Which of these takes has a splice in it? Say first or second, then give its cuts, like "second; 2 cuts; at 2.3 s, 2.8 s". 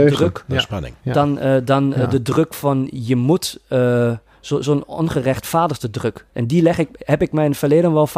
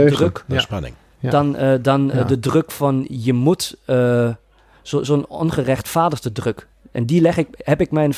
first; 3 cuts; at 1.0 s, 4.3 s, 6.3 s